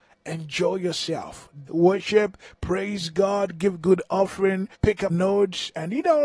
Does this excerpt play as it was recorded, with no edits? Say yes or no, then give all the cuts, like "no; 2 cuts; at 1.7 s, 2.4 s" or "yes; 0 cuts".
no; 3 cuts; at 1.7 s, 4.7 s, 5.1 s